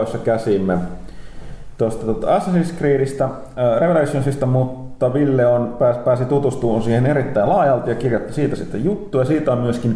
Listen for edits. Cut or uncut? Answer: uncut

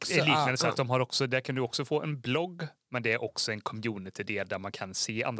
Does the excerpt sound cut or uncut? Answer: uncut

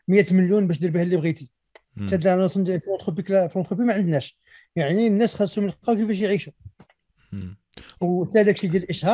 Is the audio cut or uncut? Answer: uncut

